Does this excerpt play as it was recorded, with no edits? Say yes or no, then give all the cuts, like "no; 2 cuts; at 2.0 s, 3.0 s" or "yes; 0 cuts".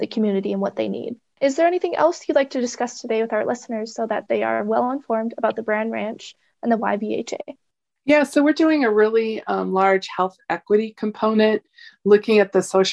yes; 0 cuts